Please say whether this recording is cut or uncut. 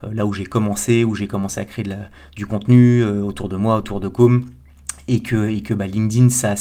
uncut